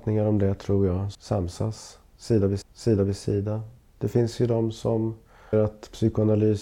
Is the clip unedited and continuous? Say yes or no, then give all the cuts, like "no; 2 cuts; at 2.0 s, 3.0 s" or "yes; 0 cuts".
no; 3 cuts; at 1.1 s, 2.6 s, 5.5 s